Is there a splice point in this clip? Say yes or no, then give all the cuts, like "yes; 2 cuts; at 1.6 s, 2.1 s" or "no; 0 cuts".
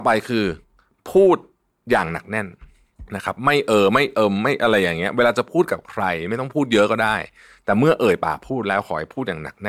no; 0 cuts